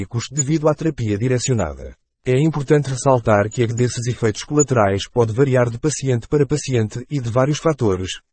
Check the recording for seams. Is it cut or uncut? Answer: cut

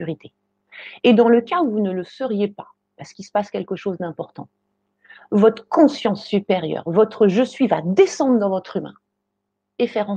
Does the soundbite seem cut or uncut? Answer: uncut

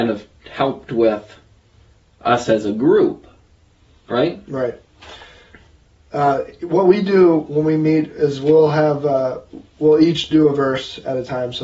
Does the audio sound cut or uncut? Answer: uncut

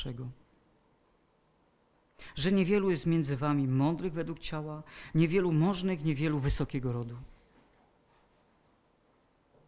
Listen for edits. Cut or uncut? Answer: uncut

